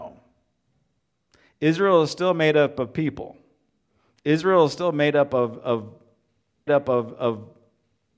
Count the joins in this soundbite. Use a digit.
1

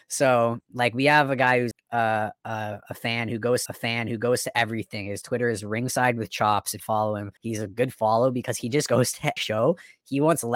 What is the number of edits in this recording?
5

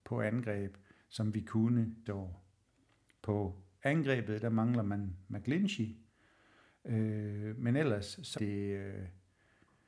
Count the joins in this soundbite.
2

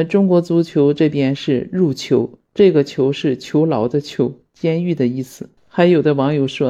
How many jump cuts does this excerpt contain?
2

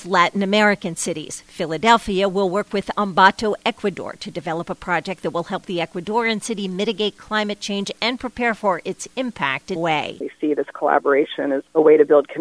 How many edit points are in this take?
1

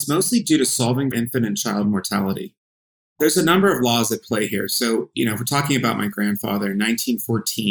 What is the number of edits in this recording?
1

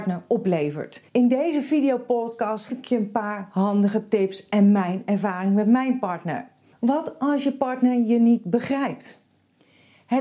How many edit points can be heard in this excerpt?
3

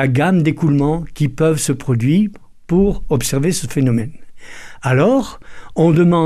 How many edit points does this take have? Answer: 0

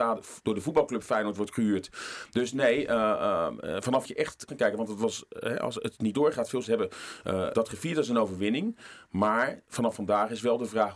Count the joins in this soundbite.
4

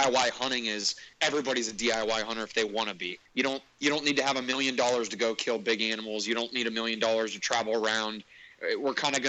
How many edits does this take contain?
2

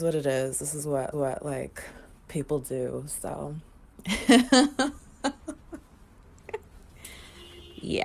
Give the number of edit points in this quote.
1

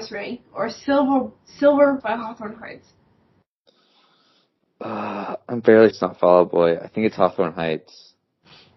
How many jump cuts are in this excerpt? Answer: 2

